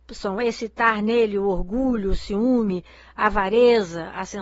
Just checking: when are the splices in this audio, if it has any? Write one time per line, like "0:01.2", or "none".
none